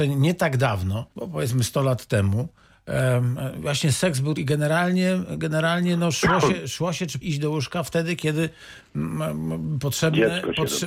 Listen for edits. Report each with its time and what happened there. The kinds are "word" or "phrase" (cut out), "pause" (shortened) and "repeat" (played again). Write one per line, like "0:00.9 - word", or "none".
0:01.1 - pause
0:04.4 - phrase
0:07.2 - phrase